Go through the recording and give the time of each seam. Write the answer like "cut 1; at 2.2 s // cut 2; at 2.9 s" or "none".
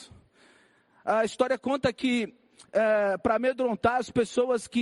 none